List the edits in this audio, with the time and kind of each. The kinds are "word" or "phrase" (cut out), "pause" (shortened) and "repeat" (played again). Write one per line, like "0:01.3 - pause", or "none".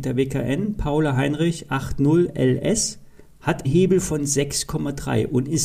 0:03.6 - word